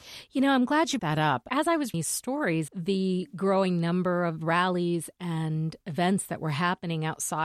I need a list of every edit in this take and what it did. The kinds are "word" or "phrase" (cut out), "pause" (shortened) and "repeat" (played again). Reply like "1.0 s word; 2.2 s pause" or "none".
1.0 s word; 1.9 s word; 2.7 s word